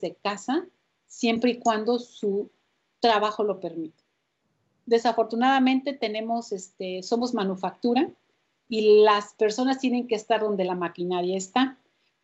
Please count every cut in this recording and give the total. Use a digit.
0